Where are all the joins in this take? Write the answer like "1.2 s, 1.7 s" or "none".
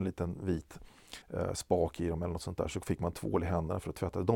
1.2 s